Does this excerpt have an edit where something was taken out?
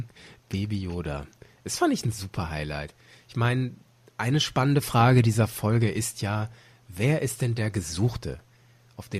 no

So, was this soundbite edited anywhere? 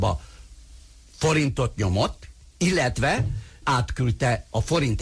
yes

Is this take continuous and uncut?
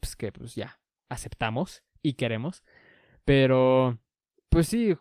yes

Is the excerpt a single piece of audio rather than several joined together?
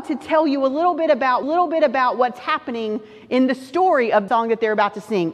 no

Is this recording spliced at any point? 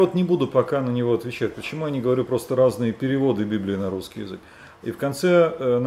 no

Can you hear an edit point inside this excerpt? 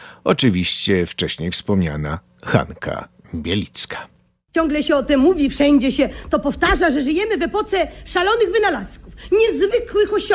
no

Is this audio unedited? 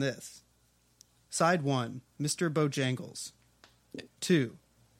no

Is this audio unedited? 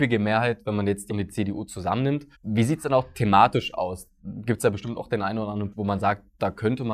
no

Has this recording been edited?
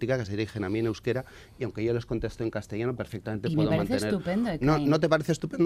no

